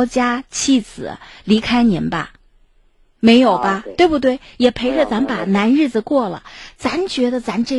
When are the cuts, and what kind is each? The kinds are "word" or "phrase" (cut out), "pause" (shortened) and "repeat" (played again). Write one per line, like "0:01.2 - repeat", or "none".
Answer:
none

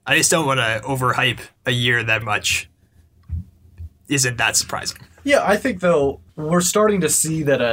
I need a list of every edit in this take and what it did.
0:01.6 - pause
0:02.2 - word
0:06.3 - pause

